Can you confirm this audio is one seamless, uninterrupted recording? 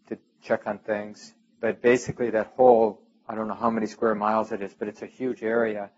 yes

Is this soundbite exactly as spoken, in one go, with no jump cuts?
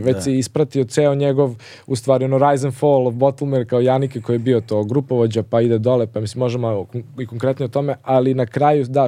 yes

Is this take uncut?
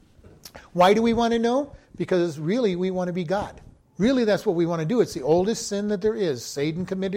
no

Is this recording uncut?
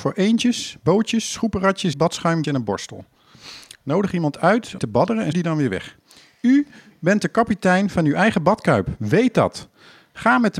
no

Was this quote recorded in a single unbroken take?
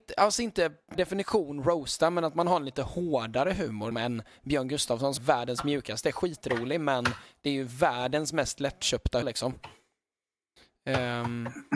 no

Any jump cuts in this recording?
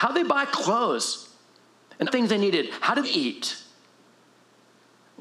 yes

